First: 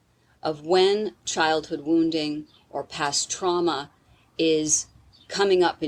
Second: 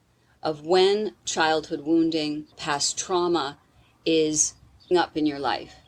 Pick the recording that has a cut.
second; 2 cuts; at 2.5 s, 4.9 s

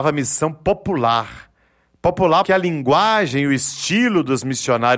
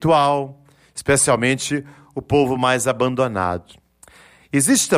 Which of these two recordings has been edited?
first; 1 cut; at 2.4 s

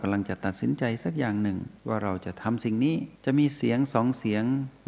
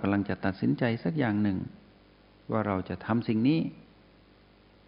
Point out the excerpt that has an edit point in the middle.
first; 2 cuts; at 1.8 s, 3.2 s

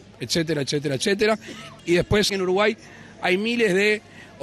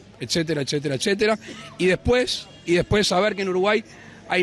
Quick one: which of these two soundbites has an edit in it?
first; 2 cuts; at 1.8 s, 2.3 s

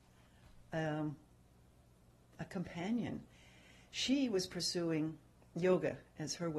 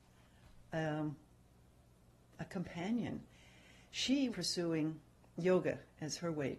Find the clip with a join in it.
second; 1 cut; at 4.3 s

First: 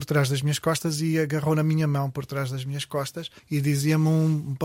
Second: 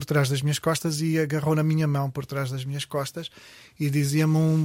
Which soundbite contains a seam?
first; 1 cut; at 3.4 s

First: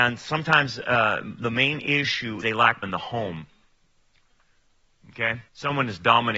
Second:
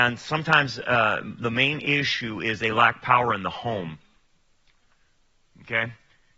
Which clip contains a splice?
first; 3 cuts; at 2.4 s, 2.8 s, 5.5 s

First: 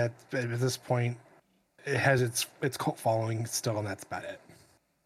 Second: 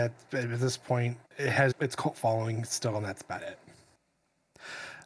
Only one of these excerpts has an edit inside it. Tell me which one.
second; 2 cuts; at 1.2 s, 1.7 s

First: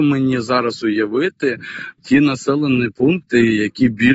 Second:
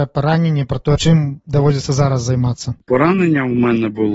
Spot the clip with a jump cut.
first; 1 cut; at 2.0 s

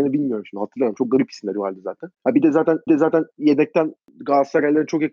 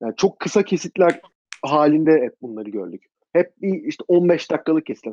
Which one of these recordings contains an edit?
first; 2 cuts; at 2.1 s, 2.9 s

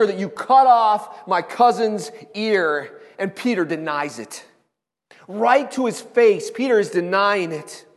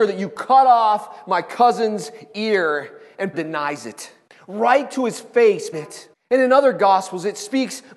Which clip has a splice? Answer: second; 4 cuts; at 3.3 s, 4.3 s, 5.7 s, 6.1 s

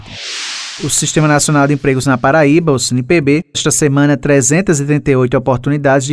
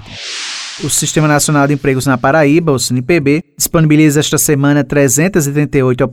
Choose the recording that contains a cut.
first; 1 cut; at 3.5 s

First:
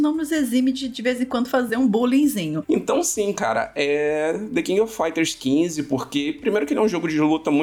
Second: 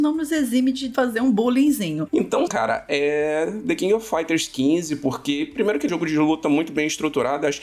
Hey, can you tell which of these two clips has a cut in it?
second; 3 cuts; at 0.9 s, 2.5 s, 5.9 s

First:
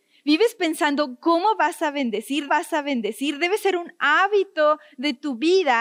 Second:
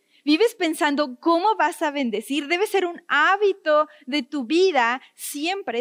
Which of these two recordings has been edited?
first; 1 cut; at 2.5 s

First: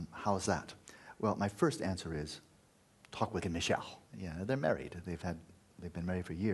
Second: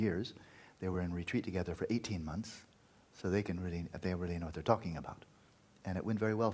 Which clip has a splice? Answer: first; 2 cuts; at 3.4 s, 4.1 s

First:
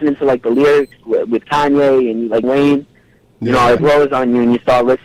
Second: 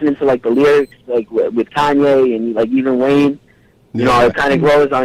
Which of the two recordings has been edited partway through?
first; 3 cuts; at 1.0 s, 2.4 s, 3.8 s

